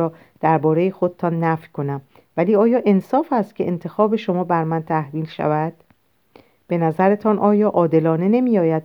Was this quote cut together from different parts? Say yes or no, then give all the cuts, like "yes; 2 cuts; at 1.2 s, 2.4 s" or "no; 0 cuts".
no; 0 cuts